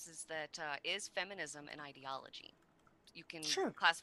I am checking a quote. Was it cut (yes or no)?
no